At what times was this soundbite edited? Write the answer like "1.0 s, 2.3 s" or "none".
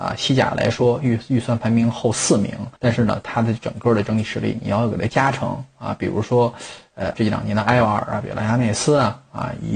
2.8 s, 7.1 s